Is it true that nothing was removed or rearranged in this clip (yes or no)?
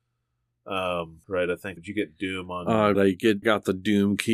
no